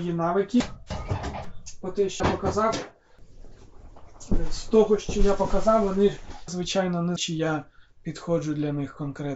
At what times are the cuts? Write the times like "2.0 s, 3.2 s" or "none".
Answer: 2.2 s, 6.5 s, 7.2 s